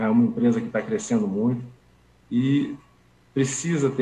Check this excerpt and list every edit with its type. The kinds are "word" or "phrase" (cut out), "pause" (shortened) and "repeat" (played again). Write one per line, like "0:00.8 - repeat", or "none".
none